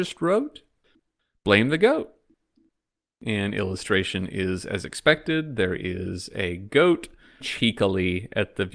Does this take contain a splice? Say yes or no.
yes